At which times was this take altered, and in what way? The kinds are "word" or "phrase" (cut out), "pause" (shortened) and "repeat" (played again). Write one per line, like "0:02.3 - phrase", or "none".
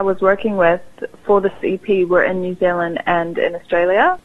none